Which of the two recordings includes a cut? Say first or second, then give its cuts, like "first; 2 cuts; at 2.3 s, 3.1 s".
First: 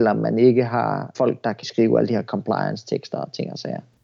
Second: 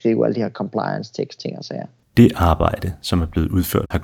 second; 1 cut; at 1.4 s